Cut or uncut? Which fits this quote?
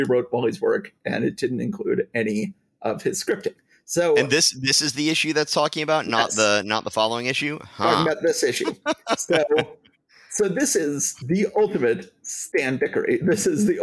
uncut